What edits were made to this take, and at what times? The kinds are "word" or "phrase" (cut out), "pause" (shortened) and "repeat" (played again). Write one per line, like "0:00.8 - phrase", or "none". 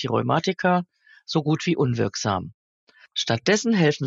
none